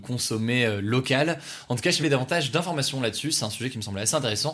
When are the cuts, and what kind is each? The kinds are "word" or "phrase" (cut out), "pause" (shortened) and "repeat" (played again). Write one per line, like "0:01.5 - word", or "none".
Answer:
0:02.0 - word